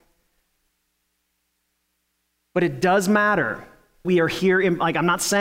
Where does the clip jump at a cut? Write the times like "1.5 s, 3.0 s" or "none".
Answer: 4.0 s

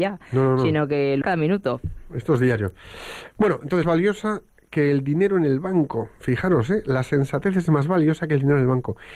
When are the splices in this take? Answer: 1.2 s, 3.8 s

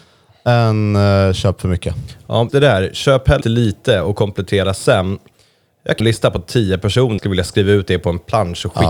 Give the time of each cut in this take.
2.5 s, 3.4 s, 6.0 s, 7.2 s

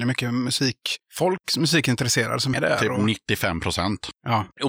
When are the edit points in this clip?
2.5 s

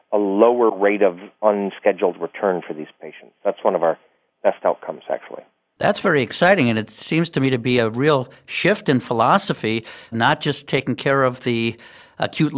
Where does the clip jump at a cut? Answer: none

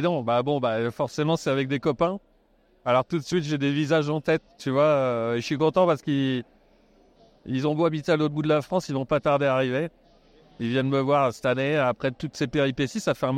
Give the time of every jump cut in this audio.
none

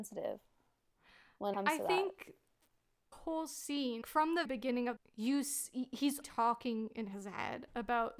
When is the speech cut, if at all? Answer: 1.5 s, 3.1 s, 4.0 s, 4.4 s, 5.0 s, 6.2 s

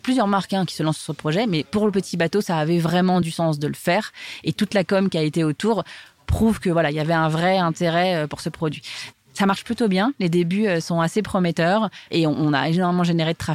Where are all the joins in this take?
none

